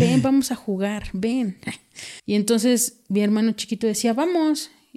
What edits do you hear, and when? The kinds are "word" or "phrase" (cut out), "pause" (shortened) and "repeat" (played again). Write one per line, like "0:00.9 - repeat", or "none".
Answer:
0:02.2 - pause